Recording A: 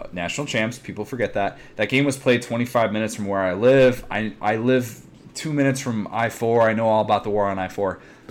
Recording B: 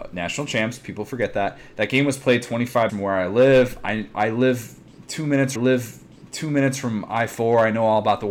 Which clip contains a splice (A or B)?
B